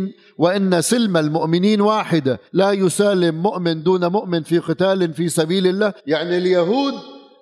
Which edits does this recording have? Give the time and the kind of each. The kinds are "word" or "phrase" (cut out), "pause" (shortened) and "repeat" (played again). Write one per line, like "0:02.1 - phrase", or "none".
0:02.5 - pause
0:06.0 - pause